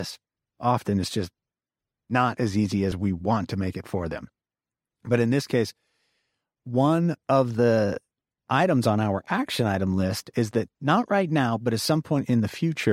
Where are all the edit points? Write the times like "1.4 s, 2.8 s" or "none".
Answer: none